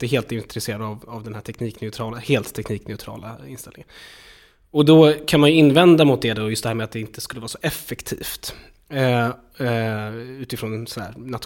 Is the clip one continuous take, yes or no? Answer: yes